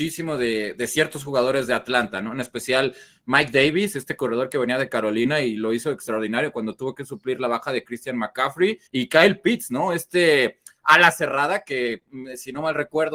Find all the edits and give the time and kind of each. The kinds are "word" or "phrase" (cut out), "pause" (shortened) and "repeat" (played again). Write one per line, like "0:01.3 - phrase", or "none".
0:08.9 - pause